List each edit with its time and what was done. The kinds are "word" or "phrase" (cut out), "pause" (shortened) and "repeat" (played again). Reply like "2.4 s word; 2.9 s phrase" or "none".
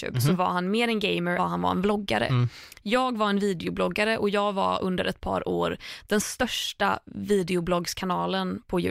1.4 s word